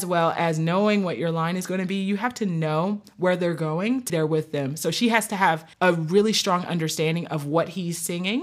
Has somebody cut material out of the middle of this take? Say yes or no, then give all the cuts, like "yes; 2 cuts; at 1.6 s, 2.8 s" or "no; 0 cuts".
yes; 2 cuts; at 4.1 s, 5.7 s